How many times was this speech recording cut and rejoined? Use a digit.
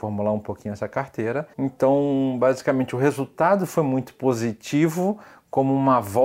1